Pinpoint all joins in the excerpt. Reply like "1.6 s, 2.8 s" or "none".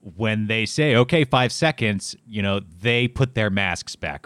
2.2 s

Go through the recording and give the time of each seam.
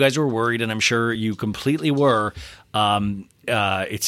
none

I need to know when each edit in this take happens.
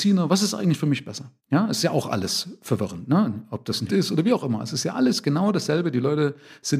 1.4 s, 3.9 s

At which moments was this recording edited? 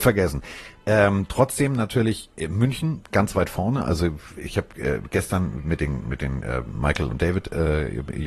none

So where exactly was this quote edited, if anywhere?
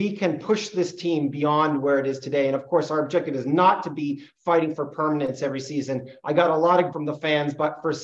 6.9 s

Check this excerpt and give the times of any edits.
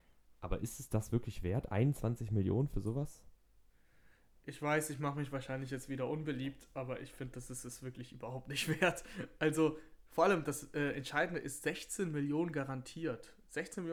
none

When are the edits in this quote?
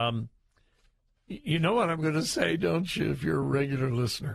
none

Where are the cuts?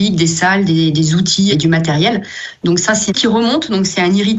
1.5 s, 3.1 s

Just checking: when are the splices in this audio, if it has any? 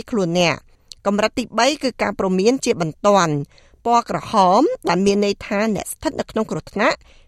none

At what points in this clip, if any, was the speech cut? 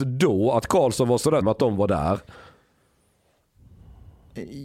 1.4 s

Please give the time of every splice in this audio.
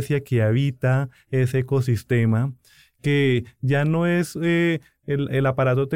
none

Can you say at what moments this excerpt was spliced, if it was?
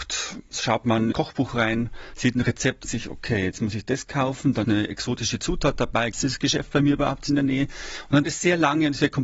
1.1 s, 2.8 s, 4.6 s, 6.1 s, 8.2 s

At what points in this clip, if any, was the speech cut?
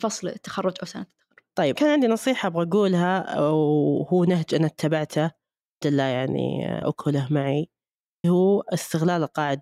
1.8 s, 5.8 s, 6.8 s, 8.2 s

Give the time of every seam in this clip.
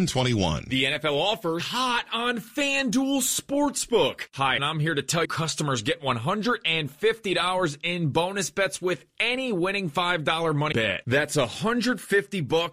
1.6 s, 4.6 s, 5.2 s, 10.7 s

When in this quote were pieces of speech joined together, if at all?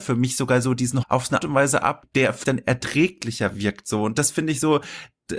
1.0 s, 1.4 s, 2.0 s, 2.4 s

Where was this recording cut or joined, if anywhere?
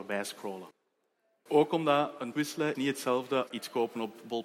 2.3 s, 2.7 s, 3.5 s

